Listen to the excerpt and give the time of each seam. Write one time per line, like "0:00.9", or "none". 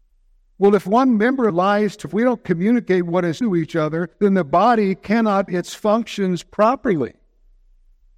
0:01.5
0:02.0
0:03.4
0:04.1
0:05.5